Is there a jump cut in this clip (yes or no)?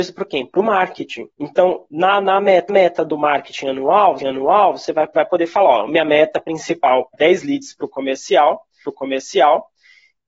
yes